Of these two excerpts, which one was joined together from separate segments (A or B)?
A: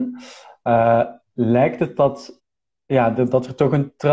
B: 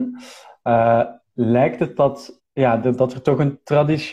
B